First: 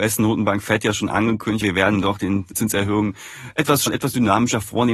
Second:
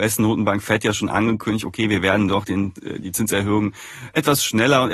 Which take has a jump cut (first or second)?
first